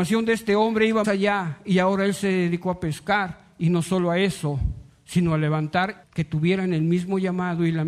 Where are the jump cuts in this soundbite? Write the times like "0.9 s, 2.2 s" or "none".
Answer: 1.0 s, 6.0 s